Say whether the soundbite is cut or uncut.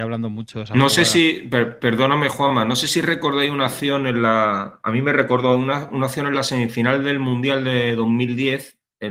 uncut